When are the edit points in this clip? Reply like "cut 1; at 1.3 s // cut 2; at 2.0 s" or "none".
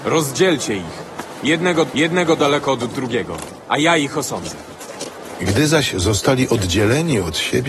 cut 1; at 1.9 s